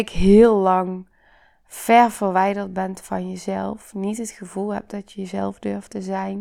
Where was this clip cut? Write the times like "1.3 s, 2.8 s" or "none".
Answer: none